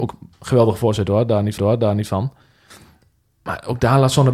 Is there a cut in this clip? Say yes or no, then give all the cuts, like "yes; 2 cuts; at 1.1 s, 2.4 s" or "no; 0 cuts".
yes; 1 cut; at 1.6 s